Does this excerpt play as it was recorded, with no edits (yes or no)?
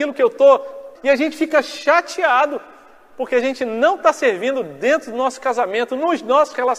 no